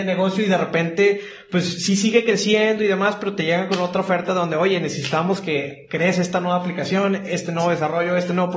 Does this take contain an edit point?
no; 0 cuts

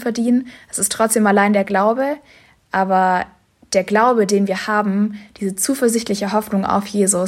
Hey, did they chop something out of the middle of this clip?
no; 0 cuts

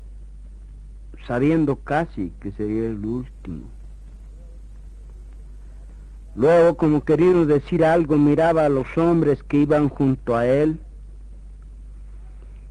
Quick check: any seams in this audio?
no; 0 cuts

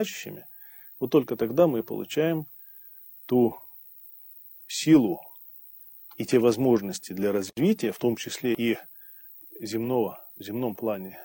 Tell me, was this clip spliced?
no; 0 cuts

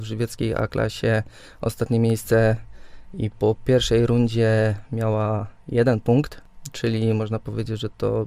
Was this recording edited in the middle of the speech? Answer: no; 0 cuts

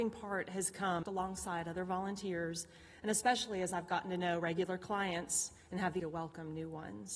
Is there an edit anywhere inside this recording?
yes; 2 cuts; at 1.0 s, 6.0 s

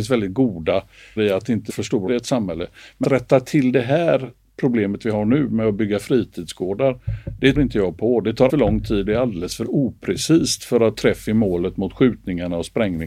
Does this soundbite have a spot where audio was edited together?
yes; 8 cuts; at 1.2 s, 1.7 s, 2.1 s, 3.0 s, 7.5 s, 8.5 s, 9.1 s, 11.0 s

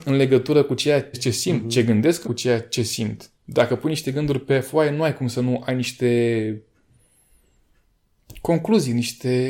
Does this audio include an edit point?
yes; 2 cuts; at 1.1 s, 2.2 s

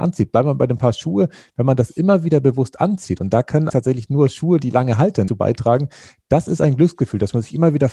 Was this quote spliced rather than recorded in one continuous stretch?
yes; 2 cuts; at 3.7 s, 5.3 s

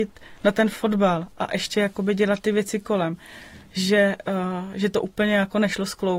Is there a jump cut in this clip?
no; 0 cuts

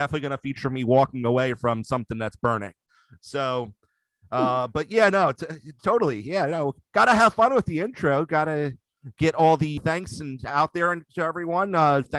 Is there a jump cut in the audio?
yes; 1 cut; at 9.8 s

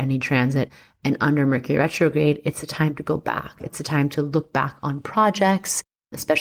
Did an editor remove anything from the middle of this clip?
no; 0 cuts

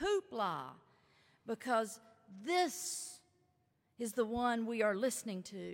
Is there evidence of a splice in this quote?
no; 0 cuts

